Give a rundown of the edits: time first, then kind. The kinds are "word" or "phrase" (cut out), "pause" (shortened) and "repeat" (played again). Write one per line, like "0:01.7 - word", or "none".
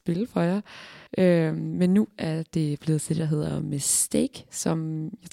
0:01.1 - pause